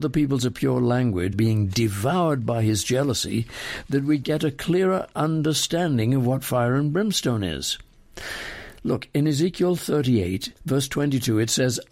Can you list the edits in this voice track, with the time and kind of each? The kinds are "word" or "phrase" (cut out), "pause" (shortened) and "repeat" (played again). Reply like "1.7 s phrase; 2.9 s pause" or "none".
1.3 s word; 10.6 s pause